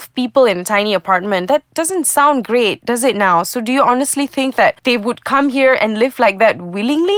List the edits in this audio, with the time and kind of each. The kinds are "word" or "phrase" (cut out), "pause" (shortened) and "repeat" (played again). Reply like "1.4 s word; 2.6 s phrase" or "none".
4.8 s pause